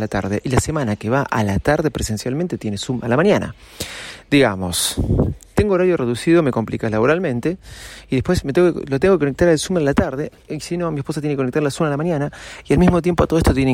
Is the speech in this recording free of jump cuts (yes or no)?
yes